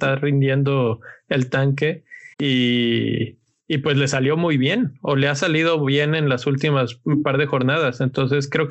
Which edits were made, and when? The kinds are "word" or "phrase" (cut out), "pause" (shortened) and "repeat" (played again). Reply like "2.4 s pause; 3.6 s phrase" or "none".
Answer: 2.3 s pause